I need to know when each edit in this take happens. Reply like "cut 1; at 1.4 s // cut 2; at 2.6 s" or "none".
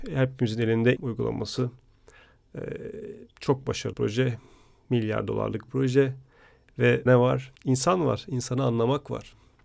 cut 1; at 1.0 s // cut 2; at 3.3 s // cut 3; at 3.9 s // cut 4; at 5.7 s // cut 5; at 7.1 s // cut 6; at 7.6 s